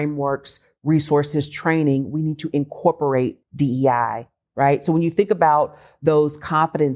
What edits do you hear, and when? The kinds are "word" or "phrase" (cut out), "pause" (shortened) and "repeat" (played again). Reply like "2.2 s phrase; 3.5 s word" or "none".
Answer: 3.4 s pause